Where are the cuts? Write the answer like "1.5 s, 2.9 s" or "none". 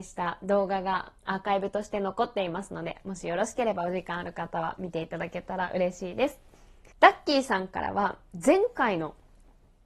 1.2 s, 6.9 s